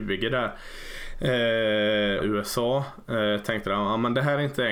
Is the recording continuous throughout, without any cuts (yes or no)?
no